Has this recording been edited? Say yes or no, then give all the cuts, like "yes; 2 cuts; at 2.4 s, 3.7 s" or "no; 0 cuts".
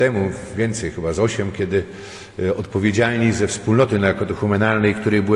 no; 0 cuts